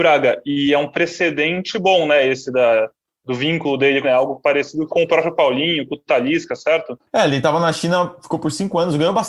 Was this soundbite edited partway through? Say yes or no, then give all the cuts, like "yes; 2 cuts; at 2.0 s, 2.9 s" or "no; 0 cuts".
yes; 3 cuts; at 4.0 s, 4.9 s, 7.1 s